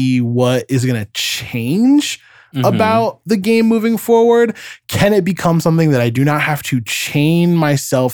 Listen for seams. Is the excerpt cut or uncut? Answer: uncut